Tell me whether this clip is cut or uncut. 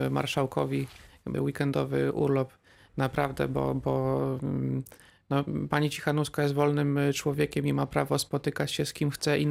cut